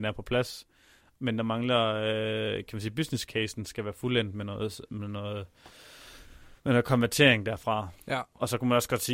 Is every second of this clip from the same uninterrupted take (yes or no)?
no